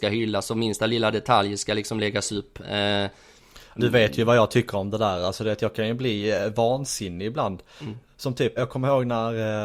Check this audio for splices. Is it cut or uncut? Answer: cut